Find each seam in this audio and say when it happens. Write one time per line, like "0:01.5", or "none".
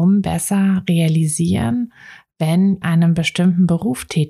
0:02.8